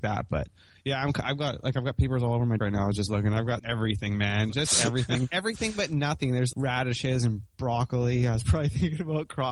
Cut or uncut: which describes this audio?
cut